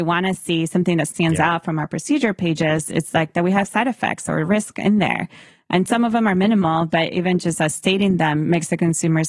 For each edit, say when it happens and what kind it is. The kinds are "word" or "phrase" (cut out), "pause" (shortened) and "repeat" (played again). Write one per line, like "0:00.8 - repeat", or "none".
none